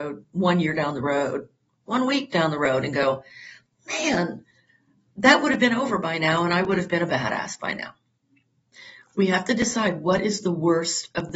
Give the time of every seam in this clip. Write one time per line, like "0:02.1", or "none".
none